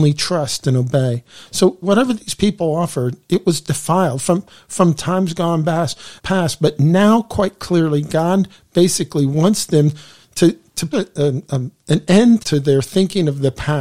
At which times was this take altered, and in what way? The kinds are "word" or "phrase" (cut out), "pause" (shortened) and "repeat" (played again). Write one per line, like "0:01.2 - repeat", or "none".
0:01.8 - word
0:06.2 - pause
0:10.9 - word
0:12.4 - word